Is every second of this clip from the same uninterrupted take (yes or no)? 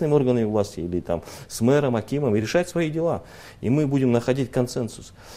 yes